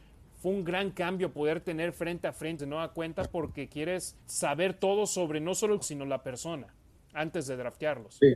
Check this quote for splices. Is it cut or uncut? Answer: cut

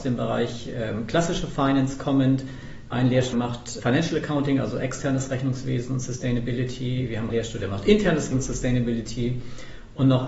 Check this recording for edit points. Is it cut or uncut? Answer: cut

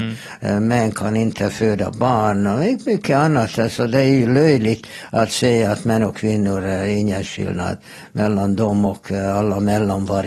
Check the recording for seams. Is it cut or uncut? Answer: uncut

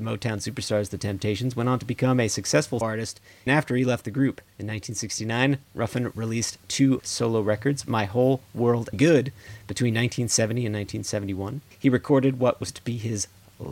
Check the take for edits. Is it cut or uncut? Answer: cut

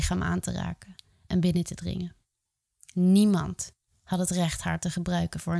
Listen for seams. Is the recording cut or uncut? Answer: uncut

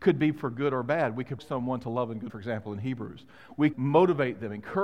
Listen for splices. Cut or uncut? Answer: cut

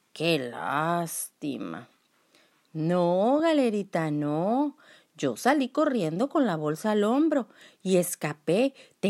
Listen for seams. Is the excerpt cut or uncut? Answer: uncut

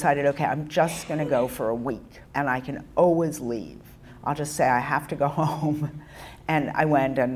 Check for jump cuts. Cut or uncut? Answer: cut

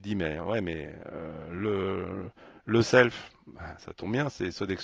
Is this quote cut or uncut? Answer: uncut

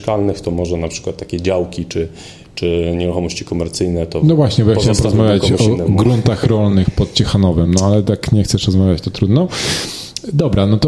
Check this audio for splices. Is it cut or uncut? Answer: uncut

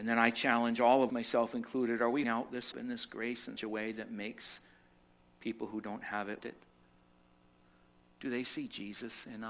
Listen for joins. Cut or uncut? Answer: cut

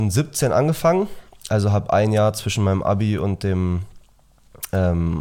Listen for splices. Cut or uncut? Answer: uncut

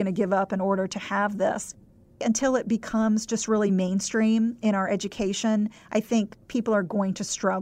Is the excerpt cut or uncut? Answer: uncut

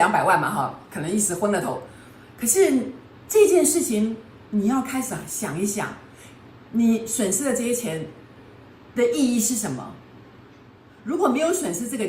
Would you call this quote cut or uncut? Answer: uncut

